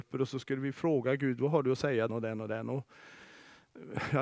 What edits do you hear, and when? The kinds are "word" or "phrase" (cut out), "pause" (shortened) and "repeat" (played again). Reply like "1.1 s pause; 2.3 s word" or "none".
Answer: 2.1 s word

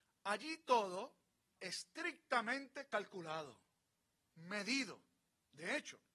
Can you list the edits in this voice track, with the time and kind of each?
1.6 s word

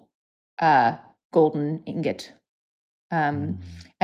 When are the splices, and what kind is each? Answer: none

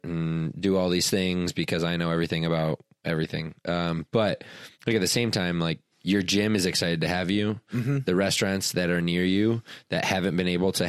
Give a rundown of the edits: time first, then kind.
4.7 s pause; 5.9 s pause

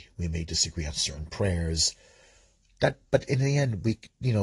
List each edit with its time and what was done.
3.1 s pause

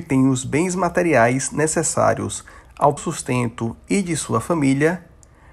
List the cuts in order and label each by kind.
3.0 s word

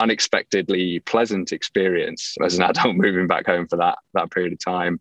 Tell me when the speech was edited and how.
2.4 s word

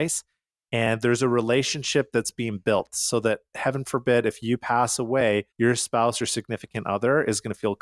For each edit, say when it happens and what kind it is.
5.5 s pause

